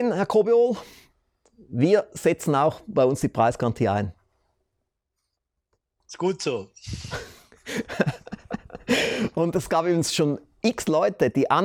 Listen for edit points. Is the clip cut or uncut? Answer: uncut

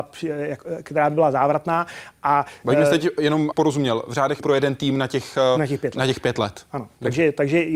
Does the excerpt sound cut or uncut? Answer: cut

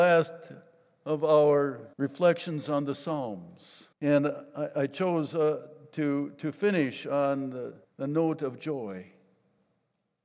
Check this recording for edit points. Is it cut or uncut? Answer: cut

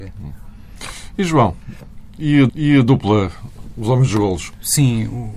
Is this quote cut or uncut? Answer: cut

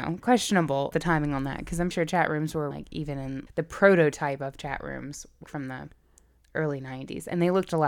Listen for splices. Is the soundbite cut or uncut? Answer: cut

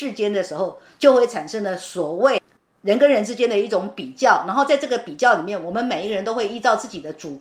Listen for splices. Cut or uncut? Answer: uncut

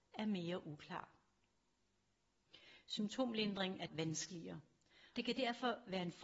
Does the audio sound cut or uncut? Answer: cut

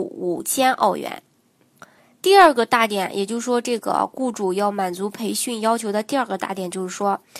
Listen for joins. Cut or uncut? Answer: cut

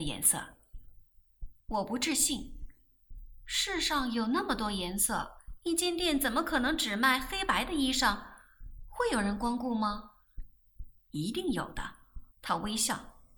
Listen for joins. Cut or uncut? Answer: cut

